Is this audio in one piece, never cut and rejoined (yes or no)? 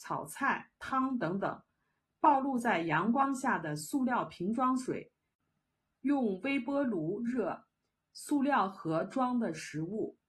yes